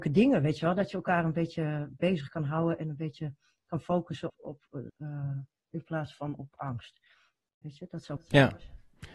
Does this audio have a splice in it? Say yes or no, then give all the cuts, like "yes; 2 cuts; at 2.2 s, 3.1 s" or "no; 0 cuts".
yes; 4 cuts; at 4.3 s, 4.9 s, 5.7 s, 6.5 s